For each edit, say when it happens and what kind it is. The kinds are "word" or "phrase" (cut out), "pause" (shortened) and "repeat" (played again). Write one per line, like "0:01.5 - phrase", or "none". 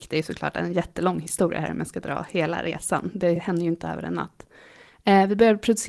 none